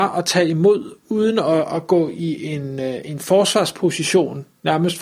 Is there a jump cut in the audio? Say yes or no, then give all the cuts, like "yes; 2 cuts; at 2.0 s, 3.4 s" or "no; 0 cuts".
no; 0 cuts